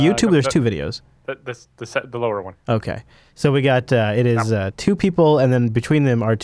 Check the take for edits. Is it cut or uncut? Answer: uncut